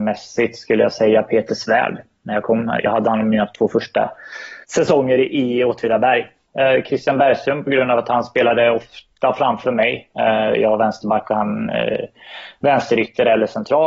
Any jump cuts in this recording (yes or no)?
yes